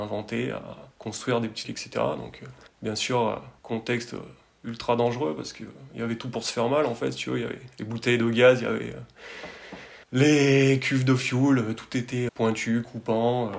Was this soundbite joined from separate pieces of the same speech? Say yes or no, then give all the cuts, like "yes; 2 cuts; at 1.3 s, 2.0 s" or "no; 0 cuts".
yes; 6 cuts; at 0.9 s, 1.6 s, 2.7 s, 3.6 s, 10.0 s, 12.3 s